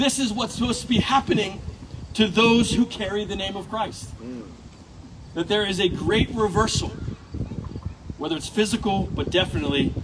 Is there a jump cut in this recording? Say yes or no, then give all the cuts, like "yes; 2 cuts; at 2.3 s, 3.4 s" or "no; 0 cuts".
no; 0 cuts